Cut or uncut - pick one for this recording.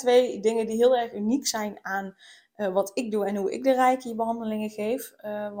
uncut